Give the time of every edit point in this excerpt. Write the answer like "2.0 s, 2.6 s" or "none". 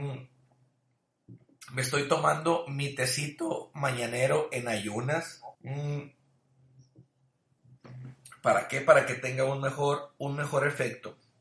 5.5 s